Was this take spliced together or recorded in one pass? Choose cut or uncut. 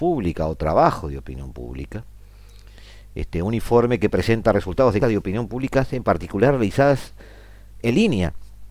cut